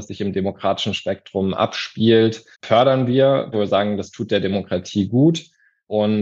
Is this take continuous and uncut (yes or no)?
no